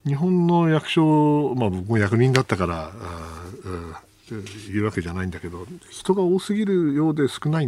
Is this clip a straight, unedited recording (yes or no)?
yes